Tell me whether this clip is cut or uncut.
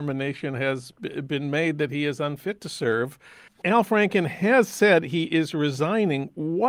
uncut